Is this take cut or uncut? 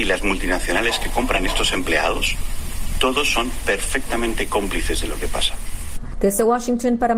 uncut